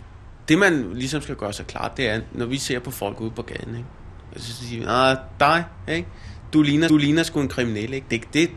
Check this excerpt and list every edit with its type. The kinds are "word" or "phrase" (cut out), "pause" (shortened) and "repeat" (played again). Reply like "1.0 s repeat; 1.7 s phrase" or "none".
2.3 s word; 6.9 s repeat